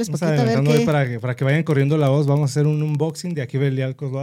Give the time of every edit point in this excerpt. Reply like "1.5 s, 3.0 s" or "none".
none